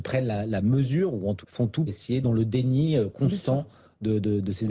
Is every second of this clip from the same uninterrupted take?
no; 3 cuts; at 1.4 s, 1.9 s, 2.2 s

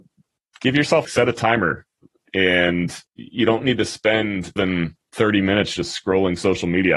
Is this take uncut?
no; 3 cuts; at 1.0 s, 3.1 s, 4.6 s

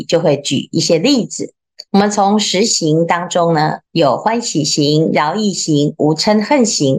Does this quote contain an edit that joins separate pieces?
yes; 2 cuts; at 1.9 s, 3.8 s

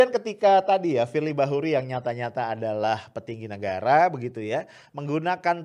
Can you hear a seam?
no; 0 cuts

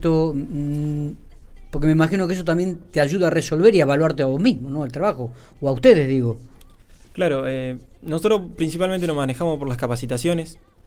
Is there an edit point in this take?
no; 0 cuts

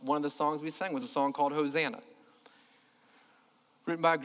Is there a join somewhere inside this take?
no; 0 cuts

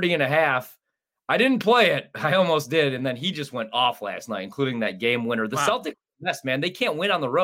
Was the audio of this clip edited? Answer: no; 0 cuts

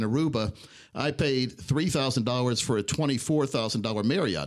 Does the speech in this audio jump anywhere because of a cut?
no; 0 cuts

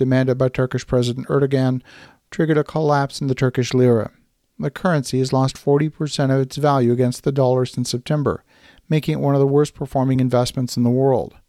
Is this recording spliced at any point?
no; 0 cuts

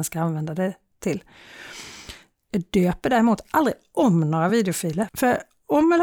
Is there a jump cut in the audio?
no; 0 cuts

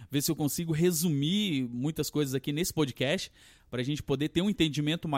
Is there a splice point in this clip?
no; 0 cuts

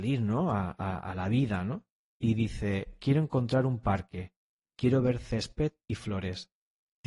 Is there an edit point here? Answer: no; 0 cuts

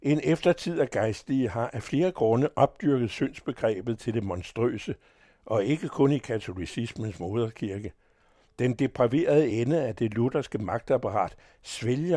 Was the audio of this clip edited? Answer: no; 0 cuts

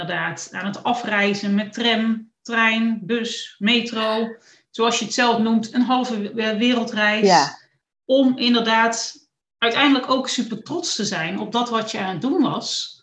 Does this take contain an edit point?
no; 0 cuts

